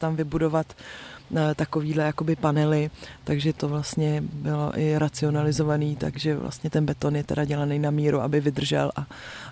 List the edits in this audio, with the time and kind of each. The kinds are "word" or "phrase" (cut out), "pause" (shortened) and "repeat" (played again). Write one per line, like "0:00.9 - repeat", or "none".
0:03.5 - word